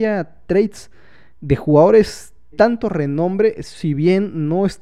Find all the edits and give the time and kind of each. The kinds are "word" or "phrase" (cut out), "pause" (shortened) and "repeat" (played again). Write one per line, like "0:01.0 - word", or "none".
0:02.5 - word